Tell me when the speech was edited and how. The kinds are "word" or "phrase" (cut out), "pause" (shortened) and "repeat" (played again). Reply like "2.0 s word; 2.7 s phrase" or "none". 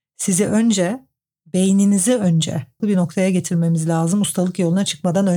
2.8 s phrase